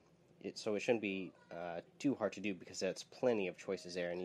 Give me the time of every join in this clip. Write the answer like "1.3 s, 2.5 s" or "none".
1.9 s